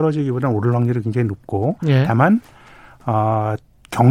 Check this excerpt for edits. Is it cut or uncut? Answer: uncut